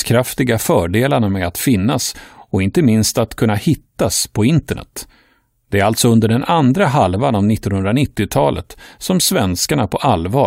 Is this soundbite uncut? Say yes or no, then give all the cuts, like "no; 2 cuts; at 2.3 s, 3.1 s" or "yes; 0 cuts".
yes; 0 cuts